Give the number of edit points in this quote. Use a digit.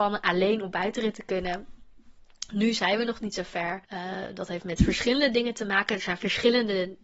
1